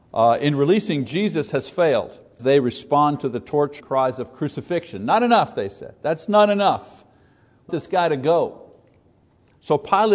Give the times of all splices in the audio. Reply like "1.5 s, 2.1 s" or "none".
2.4 s, 3.8 s, 7.7 s